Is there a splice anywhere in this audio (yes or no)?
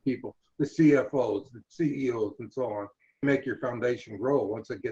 yes